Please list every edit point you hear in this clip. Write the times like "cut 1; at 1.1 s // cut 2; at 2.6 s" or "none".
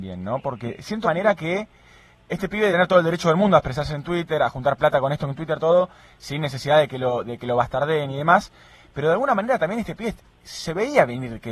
cut 1; at 1.0 s // cut 2; at 2.1 s // cut 3; at 2.7 s